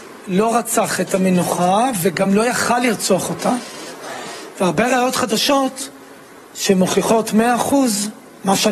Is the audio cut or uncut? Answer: uncut